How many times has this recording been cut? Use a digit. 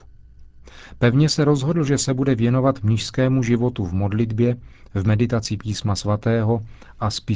0